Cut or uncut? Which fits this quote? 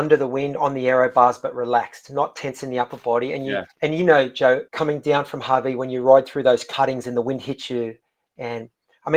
cut